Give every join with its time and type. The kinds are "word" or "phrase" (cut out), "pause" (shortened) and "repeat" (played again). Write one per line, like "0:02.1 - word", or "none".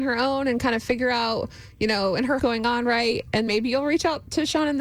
0:02.4 - phrase
0:03.5 - word